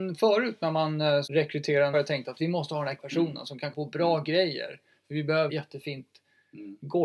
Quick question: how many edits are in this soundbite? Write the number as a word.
five